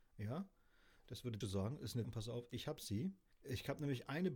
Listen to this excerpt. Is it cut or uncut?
cut